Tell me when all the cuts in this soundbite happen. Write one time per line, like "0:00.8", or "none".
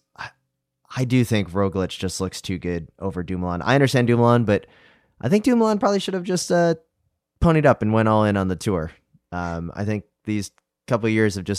none